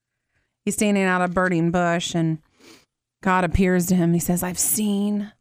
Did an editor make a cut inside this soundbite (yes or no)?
no